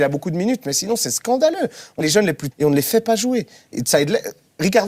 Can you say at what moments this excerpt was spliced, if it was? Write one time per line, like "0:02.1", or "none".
0:02.0
0:02.5
0:03.7